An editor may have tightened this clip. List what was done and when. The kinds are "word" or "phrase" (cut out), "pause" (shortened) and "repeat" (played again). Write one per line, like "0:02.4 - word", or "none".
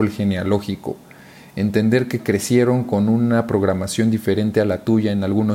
none

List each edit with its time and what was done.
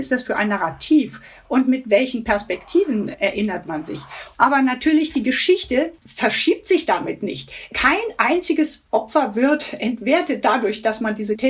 none

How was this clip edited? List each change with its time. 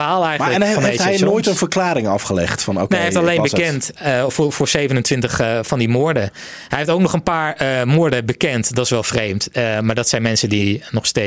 none

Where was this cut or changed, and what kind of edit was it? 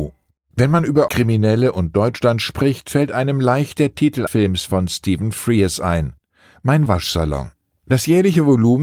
0:01.1 - word
0:04.3 - word
0:06.9 - word

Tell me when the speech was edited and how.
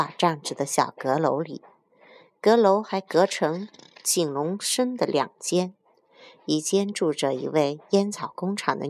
none

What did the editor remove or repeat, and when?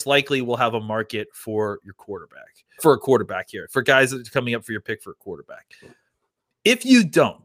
0:02.8 - word

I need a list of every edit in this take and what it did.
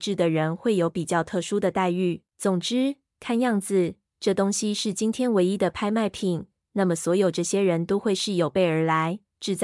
0:02.3 - pause

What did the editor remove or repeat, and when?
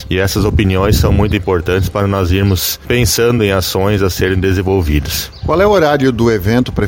none

